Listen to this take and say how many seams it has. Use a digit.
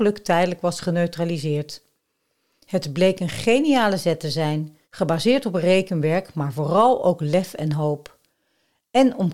1